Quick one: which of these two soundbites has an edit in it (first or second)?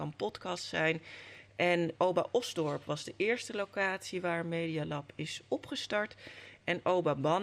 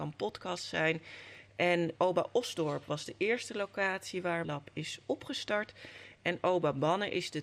second